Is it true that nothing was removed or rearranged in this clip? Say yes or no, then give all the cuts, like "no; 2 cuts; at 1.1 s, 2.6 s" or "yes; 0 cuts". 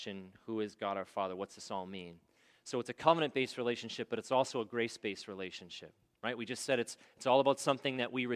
yes; 0 cuts